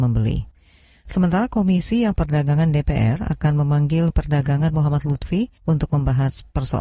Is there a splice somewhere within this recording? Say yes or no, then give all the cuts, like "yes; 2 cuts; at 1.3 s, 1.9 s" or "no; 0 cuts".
yes; 3 cuts; at 2.1 s, 4.1 s, 5.6 s